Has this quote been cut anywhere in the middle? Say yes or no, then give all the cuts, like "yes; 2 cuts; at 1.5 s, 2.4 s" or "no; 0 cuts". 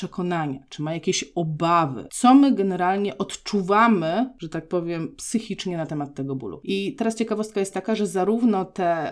no; 0 cuts